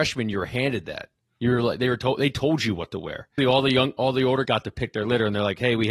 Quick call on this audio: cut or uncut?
cut